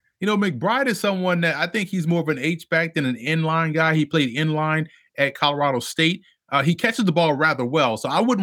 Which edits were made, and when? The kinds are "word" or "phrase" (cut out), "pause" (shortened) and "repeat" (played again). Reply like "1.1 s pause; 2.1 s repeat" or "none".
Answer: none